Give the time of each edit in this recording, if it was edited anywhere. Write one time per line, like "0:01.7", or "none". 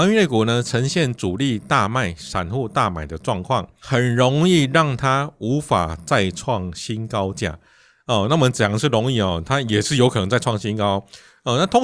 none